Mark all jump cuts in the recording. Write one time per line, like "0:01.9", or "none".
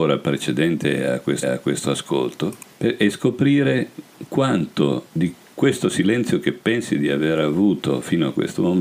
0:01.4
0:05.1

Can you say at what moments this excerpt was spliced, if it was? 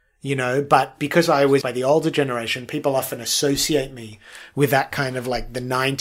0:01.6

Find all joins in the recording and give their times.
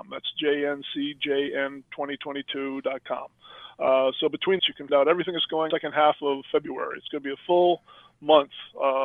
0:04.6
0:04.9
0:05.7

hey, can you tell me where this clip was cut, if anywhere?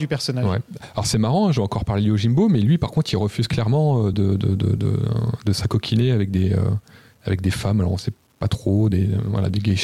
none

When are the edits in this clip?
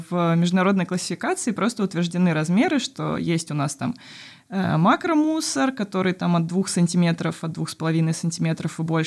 none

